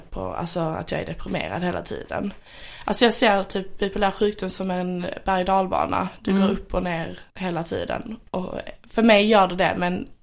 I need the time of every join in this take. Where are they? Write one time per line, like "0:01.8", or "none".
0:07.3
0:08.3

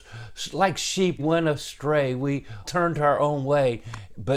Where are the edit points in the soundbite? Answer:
0:01.2
0:02.6

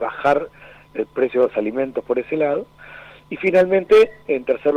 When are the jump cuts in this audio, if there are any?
none

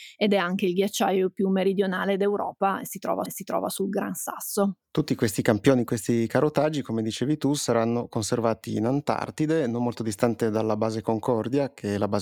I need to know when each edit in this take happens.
0:03.3

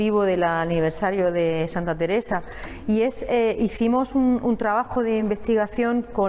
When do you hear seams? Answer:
none

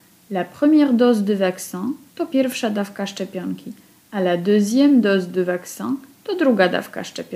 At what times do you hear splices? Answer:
none

